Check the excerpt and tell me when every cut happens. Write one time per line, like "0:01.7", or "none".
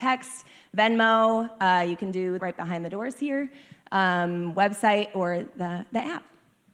0:02.4